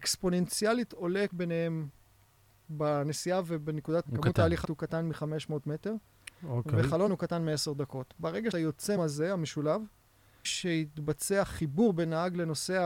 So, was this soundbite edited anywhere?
yes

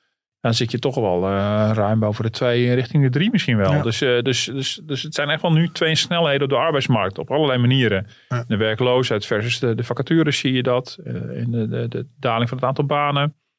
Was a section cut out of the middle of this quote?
no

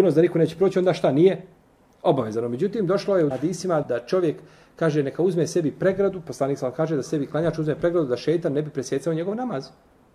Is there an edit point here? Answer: yes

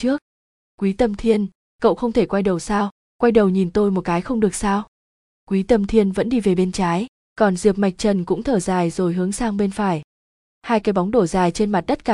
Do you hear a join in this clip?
no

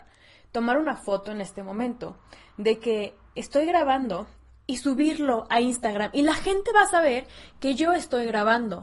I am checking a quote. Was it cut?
yes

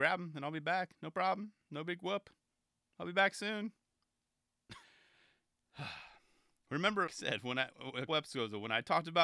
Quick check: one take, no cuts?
no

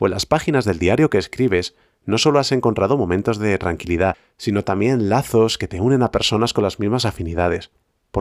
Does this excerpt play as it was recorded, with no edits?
yes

